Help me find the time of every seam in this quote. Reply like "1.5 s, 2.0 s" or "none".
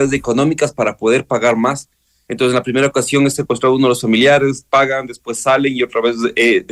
none